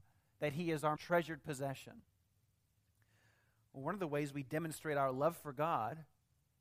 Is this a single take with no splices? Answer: no; 1 cut; at 1.0 s

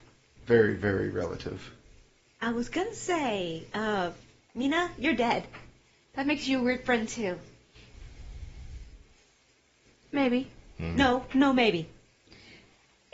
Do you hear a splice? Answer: no; 0 cuts

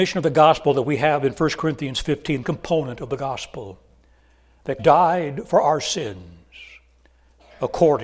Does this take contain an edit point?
yes; 2 cuts; at 2.4 s, 4.8 s

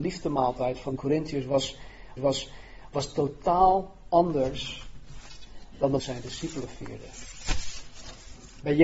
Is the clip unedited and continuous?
no; 3 cuts; at 1.0 s, 2.2 s, 6.0 s

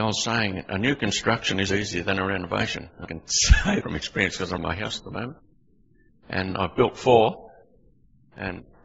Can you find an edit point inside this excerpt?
yes; 4 cuts; at 1.7 s, 3.0 s, 3.8 s, 4.6 s

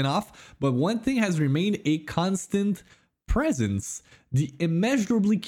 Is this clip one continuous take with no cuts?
yes; 0 cuts

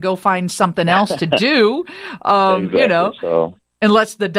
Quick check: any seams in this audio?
no; 0 cuts

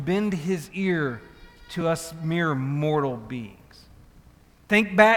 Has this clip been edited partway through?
no; 0 cuts

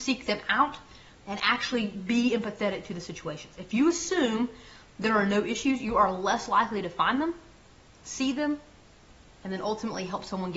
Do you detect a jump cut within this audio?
no; 0 cuts

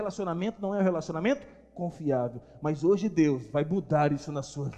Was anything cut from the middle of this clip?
no; 0 cuts

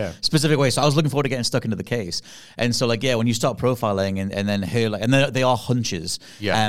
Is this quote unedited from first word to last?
yes; 0 cuts

